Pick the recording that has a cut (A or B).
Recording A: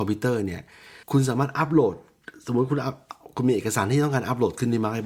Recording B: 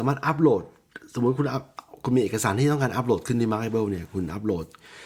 A